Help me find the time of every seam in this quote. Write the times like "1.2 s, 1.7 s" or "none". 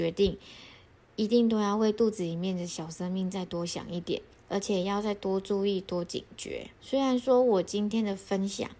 4.3 s, 6.8 s